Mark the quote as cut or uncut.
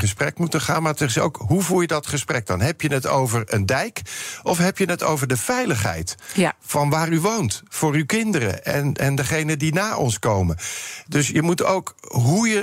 uncut